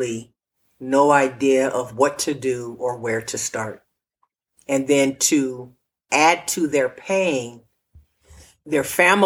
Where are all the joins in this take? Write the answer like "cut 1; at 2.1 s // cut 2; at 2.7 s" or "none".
none